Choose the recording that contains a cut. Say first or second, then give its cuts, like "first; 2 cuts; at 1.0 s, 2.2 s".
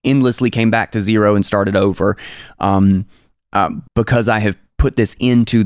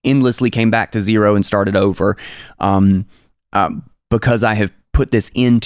first; 1 cut; at 3.9 s